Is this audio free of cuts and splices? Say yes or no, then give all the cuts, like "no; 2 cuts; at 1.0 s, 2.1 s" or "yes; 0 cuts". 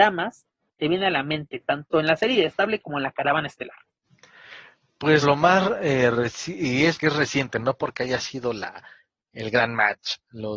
no; 2 cuts; at 5.2 s, 7.0 s